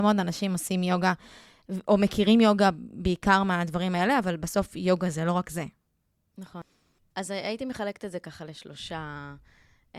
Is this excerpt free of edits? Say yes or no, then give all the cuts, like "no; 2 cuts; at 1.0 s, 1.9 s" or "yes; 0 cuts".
yes; 0 cuts